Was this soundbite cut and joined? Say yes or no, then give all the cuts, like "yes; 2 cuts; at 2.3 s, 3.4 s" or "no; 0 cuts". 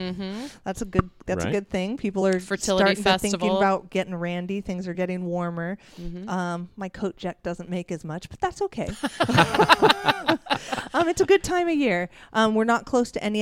no; 0 cuts